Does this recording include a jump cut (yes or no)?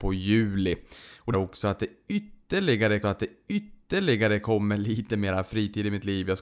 yes